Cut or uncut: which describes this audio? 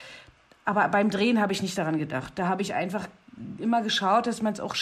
uncut